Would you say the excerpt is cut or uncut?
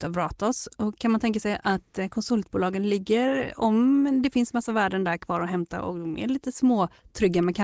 uncut